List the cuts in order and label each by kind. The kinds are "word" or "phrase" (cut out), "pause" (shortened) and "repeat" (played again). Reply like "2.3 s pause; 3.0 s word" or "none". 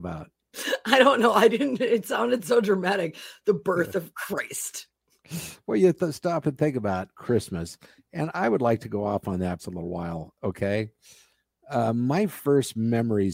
9.6 s word